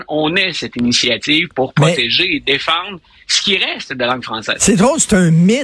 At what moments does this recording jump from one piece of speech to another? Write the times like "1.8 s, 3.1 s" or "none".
none